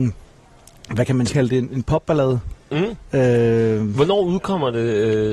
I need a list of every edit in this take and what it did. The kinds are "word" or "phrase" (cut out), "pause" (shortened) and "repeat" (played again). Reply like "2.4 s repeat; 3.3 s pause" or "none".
1.3 s phrase